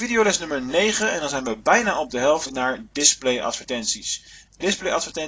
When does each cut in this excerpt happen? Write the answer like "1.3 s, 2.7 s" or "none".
2.5 s

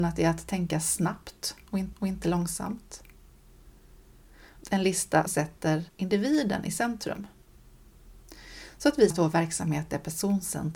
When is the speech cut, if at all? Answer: 1.9 s, 4.6 s, 5.3 s, 5.9 s, 9.1 s

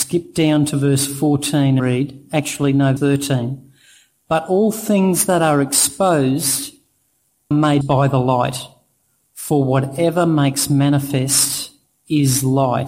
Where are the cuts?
1.8 s, 3.0 s, 7.5 s, 7.8 s

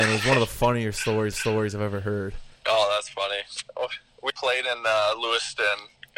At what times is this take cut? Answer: 1.3 s, 2.6 s, 4.3 s

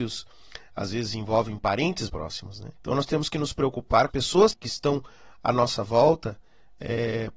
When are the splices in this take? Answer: 2.1 s, 2.8 s, 4.1 s, 4.5 s

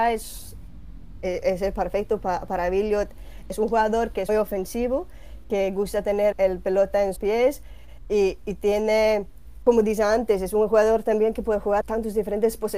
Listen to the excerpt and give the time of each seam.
4.3 s, 6.3 s, 7.2 s, 11.8 s

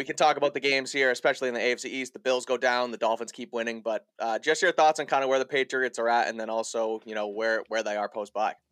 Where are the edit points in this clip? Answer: none

